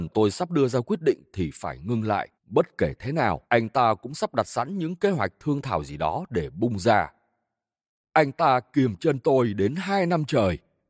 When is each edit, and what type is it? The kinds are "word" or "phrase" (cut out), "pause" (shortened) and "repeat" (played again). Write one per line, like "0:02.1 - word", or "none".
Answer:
0:02.3 - pause
0:03.4 - pause